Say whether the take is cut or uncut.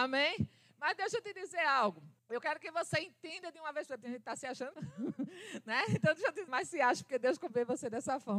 cut